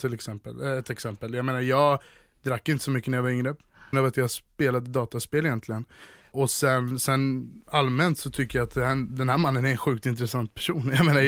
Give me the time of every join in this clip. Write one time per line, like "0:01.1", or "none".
0:03.9